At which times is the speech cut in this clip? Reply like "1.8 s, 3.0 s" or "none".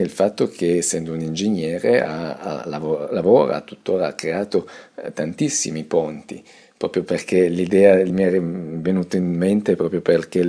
none